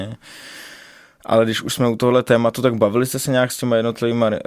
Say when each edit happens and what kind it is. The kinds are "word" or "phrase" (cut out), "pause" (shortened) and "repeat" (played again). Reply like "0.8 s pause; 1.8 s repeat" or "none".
none